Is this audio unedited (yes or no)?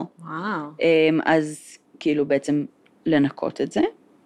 yes